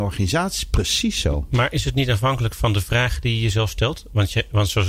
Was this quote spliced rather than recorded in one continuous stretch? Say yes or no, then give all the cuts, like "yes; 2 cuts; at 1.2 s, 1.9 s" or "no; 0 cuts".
no; 0 cuts